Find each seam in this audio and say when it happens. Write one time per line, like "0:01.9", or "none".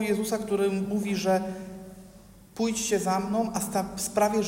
none

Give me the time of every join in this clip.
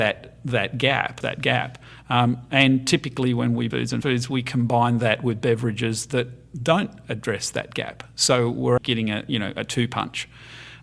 0:01.2
0:03.7
0:04.0
0:08.8

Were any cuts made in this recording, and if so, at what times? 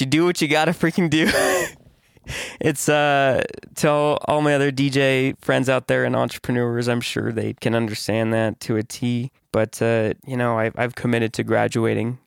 0:07.6
0:09.4
0:10.2

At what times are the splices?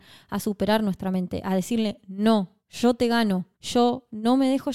0:02.6
0:03.5

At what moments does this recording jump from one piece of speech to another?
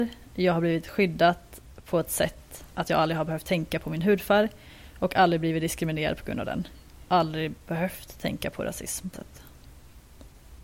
0:09.1

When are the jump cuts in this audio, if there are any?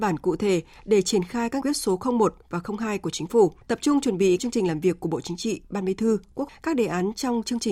0:01.6
0:03.6
0:04.4
0:06.5

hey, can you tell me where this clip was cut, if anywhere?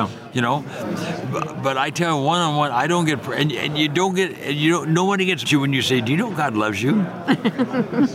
0:05.4

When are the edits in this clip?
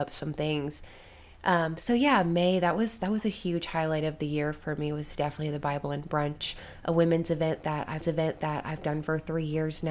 0:08.0

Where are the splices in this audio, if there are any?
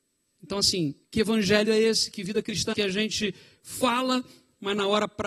0:01.0
0:02.7

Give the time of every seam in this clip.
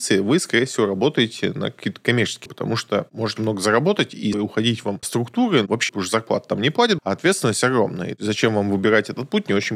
0:02.5
0:03.4
0:04.3
0:05.0
0:05.9
0:07.0

